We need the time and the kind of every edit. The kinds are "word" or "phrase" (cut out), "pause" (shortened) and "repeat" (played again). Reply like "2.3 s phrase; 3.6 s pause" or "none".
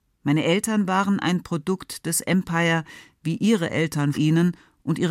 4.1 s word